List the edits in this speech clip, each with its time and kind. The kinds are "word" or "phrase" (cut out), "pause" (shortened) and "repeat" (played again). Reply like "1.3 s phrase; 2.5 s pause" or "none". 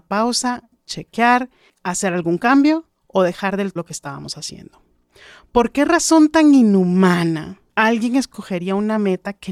3.0 s pause; 3.8 s word; 7.7 s pause

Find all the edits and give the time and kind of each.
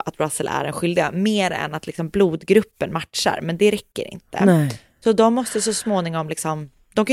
none

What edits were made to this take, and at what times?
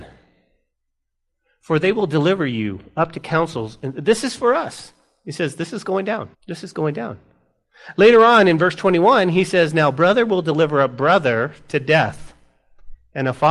6.3 s pause

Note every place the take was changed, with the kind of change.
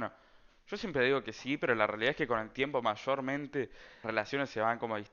4.0 s word

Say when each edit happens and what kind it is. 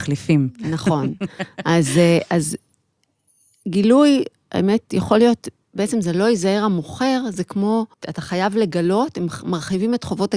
7.9 s pause

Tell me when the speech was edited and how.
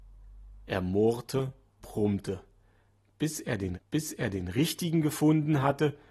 1.8 s word; 3.7 s repeat

